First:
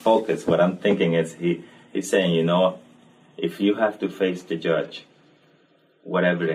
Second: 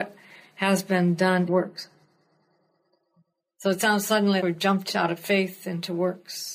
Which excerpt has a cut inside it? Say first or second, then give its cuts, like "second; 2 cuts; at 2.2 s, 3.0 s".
second; 2 cuts; at 1.5 s, 4.4 s